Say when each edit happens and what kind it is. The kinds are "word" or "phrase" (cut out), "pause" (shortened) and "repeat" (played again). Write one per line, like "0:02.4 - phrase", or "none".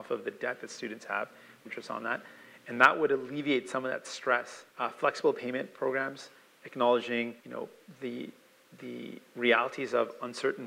0:01.7 - phrase
0:04.7 - pause
0:07.4 - pause